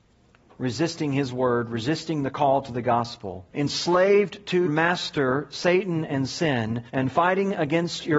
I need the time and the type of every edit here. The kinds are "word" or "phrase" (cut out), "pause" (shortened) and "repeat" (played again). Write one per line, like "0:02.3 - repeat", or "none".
0:03.5 - pause
0:04.7 - word
0:06.9 - pause